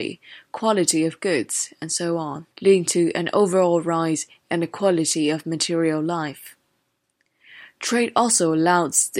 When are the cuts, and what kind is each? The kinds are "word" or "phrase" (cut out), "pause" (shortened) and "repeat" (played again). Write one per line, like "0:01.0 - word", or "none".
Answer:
0:02.5 - pause